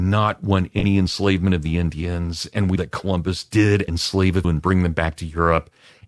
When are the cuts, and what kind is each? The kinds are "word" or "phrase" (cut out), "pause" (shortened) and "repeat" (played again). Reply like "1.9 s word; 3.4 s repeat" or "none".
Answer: 2.8 s word; 3.9 s word; 4.4 s word